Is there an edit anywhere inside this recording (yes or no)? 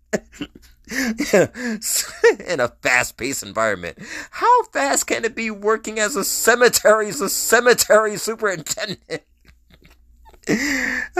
yes